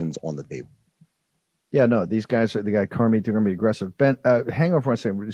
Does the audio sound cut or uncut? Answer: uncut